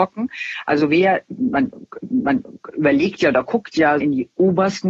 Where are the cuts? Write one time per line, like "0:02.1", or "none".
0:02.0
0:04.0